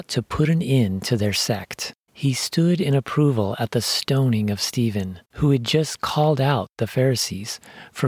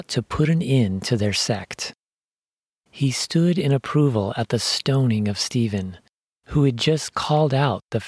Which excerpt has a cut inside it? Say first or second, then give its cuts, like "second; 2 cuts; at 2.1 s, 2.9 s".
first; 2 cuts; at 2.0 s, 5.2 s